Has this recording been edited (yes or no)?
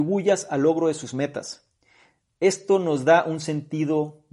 no